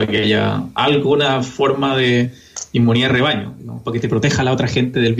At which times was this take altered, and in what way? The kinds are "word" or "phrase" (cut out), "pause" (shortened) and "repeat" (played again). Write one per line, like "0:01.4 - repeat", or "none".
none